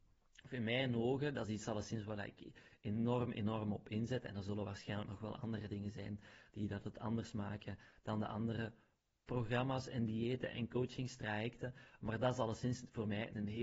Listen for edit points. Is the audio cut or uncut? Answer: uncut